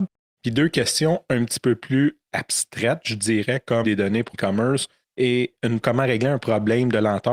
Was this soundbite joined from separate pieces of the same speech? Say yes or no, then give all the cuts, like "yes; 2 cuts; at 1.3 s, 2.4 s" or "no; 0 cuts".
yes; 3 cuts; at 3.8 s, 4.3 s, 5.8 s